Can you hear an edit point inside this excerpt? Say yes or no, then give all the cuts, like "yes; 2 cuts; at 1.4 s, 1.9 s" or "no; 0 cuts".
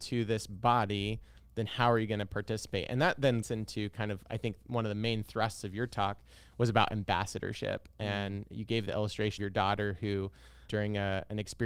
yes; 4 cuts; at 3.4 s, 8.5 s, 9.4 s, 10.7 s